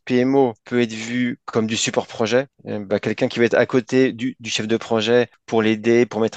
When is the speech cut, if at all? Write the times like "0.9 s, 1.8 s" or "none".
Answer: none